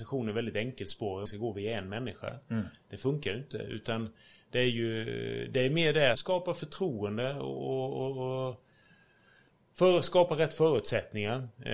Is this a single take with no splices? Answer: no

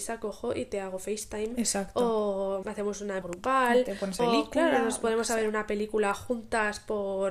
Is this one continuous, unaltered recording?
no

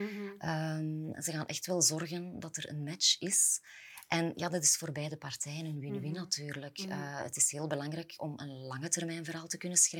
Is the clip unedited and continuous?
yes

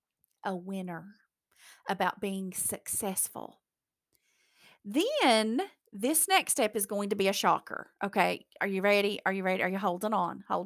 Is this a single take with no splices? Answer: yes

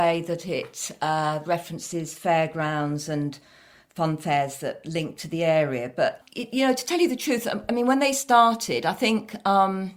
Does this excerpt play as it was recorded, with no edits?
yes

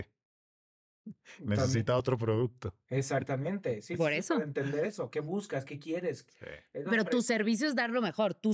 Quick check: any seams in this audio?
no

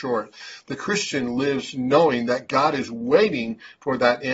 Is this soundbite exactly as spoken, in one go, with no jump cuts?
yes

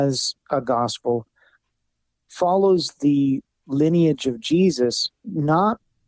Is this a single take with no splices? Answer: yes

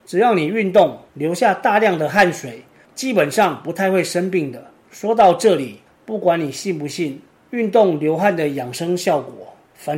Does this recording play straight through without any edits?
no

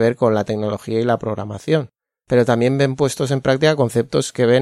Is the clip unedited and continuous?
yes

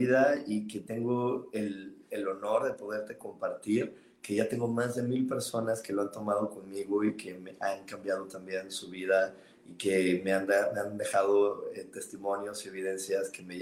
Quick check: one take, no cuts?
yes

